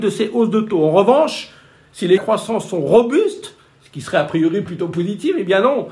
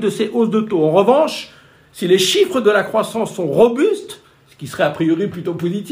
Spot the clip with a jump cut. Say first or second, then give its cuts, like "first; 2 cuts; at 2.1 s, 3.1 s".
first; 1 cut; at 2.2 s